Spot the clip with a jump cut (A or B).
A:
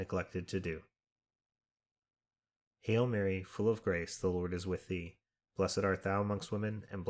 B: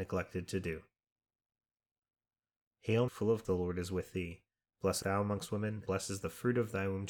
B